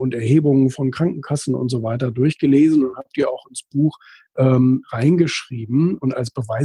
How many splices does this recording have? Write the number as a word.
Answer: zero